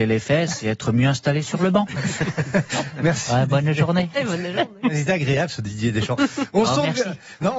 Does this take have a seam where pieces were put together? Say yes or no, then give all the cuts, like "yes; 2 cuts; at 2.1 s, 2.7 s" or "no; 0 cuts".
no; 0 cuts